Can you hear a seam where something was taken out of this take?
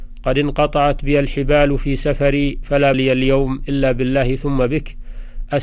yes; 1 cut; at 2.9 s

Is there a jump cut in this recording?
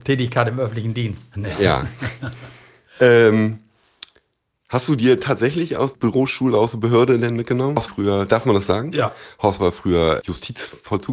yes; 3 cuts; at 5.9 s, 7.9 s, 10.2 s

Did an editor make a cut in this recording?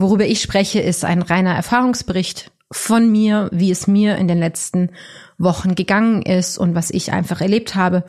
no; 0 cuts

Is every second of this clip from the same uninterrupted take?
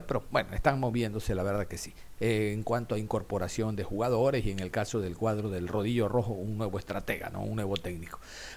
yes; 0 cuts

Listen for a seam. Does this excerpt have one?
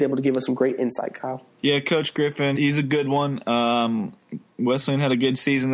yes; 2 cuts; at 1.5 s, 2.6 s

